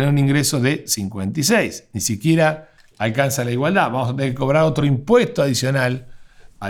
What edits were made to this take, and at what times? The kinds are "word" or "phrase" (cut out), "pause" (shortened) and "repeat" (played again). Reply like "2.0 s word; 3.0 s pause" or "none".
none